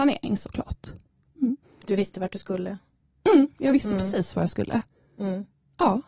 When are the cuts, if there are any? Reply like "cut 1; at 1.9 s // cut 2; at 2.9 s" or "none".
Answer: cut 1; at 1.6 s